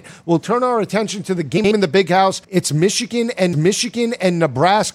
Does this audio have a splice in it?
yes; 2 cuts; at 2.4 s, 3.5 s

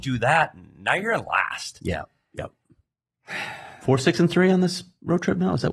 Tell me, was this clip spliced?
no; 0 cuts

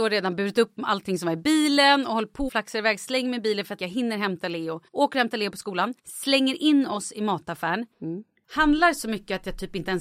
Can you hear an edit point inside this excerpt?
yes; 5 cuts; at 2.5 s, 3.8 s, 4.9 s, 6.0 s, 7.9 s

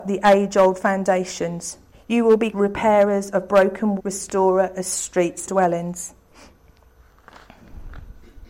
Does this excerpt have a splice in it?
yes; 4 cuts; at 1.9 s, 2.5 s, 4.0 s, 5.5 s

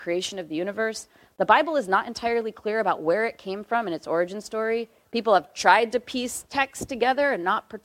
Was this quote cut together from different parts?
no; 0 cuts

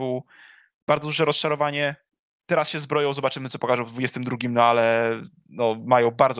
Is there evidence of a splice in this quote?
no; 0 cuts

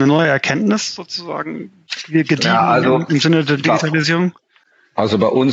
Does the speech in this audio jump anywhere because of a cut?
no; 0 cuts

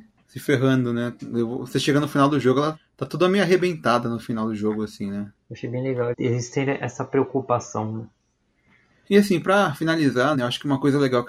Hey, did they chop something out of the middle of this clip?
yes; 3 cuts; at 5.4 s, 6.1 s, 10.3 s

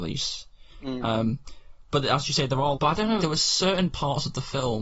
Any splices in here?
yes; 2 cuts; at 2.7 s, 3.2 s

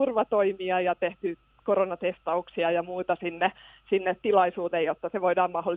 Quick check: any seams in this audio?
no; 0 cuts

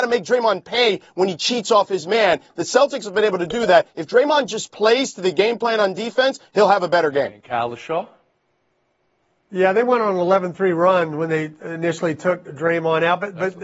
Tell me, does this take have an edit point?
no; 0 cuts

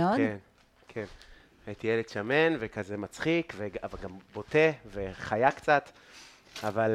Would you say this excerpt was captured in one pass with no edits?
yes; 0 cuts

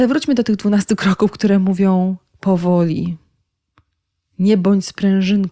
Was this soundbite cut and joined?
no; 0 cuts

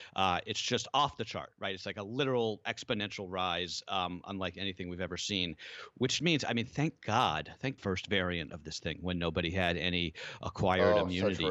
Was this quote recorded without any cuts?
no; 2 cuts; at 6.2 s, 7.8 s

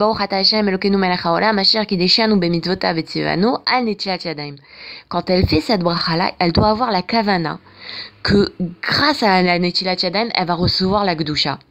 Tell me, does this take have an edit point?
no; 0 cuts

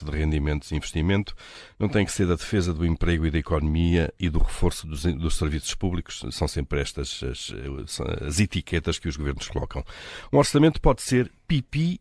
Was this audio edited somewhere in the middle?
no; 0 cuts

